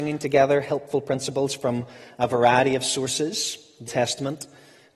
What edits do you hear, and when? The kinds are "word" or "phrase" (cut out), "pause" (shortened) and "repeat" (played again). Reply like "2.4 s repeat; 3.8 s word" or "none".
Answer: 3.9 s word